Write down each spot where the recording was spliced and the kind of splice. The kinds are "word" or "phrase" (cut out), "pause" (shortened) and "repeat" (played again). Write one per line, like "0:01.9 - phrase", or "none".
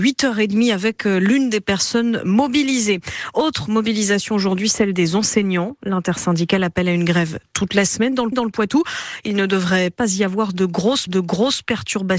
0:08.3 - repeat
0:11.1 - repeat